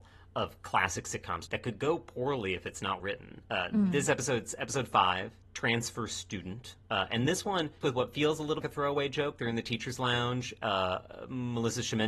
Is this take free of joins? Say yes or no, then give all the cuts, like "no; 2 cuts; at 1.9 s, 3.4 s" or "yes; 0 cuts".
no; 7 cuts; at 1.5 s, 3.0 s, 3.4 s, 5.4 s, 6.8 s, 7.8 s, 8.6 s